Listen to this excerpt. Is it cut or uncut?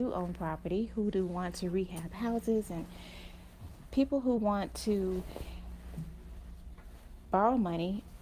uncut